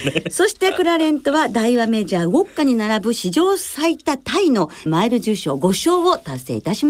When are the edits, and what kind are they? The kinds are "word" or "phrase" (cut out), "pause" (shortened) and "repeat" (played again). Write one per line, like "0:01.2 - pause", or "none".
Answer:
0:04.9 - word